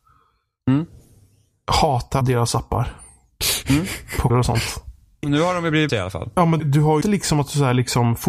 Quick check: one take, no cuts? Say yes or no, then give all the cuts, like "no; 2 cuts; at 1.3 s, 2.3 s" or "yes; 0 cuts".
no; 6 cuts; at 2.2 s, 4.3 s, 5.2 s, 5.9 s, 6.6 s, 7.0 s